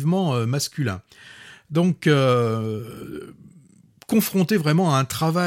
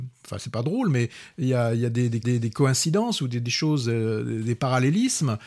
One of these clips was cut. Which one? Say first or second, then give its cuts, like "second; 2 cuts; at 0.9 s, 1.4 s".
second; 1 cut; at 2.2 s